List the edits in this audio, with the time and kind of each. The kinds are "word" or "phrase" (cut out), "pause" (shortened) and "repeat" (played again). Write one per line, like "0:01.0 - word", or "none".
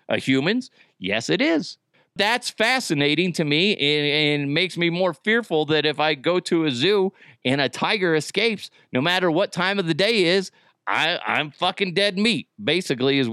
none